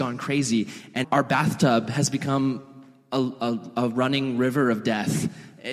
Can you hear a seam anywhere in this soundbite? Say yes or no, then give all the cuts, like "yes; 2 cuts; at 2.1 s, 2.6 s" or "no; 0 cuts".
yes; 1 cut; at 1.0 s